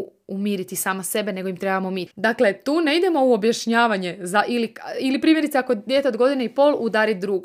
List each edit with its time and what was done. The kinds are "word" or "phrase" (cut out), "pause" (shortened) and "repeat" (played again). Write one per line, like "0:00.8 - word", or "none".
0:02.1 - pause